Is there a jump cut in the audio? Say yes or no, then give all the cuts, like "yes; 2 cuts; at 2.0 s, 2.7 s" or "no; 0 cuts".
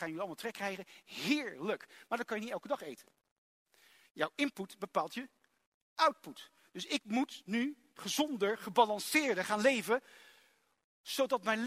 no; 0 cuts